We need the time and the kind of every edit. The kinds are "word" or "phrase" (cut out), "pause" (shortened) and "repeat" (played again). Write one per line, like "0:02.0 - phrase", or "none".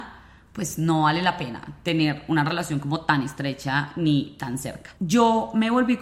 0:05.0 - pause